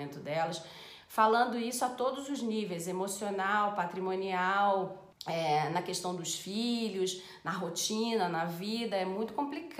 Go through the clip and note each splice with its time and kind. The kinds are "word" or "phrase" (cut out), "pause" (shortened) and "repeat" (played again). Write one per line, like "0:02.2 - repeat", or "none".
0:05.1 - pause